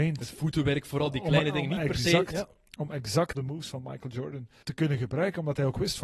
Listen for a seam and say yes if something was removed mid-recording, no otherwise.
yes